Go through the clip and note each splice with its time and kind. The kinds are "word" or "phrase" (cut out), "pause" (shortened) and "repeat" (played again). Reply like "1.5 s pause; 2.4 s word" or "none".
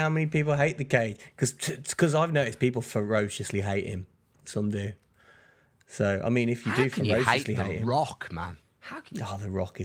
none